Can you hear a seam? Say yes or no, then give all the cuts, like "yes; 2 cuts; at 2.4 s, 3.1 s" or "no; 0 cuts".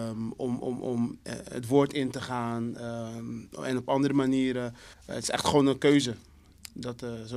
yes; 1 cut; at 4.9 s